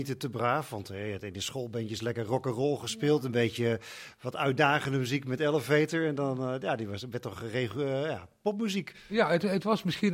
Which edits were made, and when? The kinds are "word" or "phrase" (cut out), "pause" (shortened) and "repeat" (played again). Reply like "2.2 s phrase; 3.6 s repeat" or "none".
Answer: none